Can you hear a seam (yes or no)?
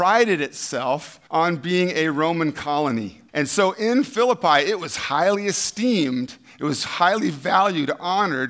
yes